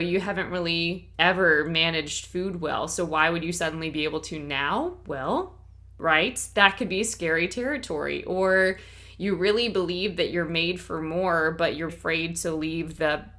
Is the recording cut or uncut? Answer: cut